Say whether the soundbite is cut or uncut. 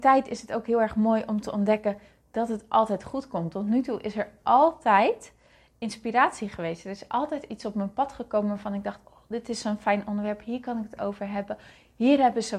uncut